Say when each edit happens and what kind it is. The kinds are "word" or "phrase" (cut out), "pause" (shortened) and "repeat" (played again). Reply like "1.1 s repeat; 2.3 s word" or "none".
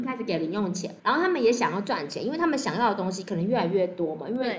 1.0 s pause

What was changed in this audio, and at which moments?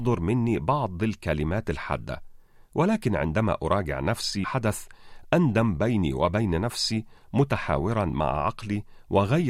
4.4 s phrase

